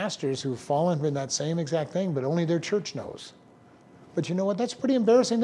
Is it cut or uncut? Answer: uncut